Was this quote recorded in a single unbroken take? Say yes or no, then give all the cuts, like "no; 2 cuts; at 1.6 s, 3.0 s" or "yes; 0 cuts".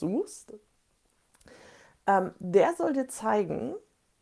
yes; 0 cuts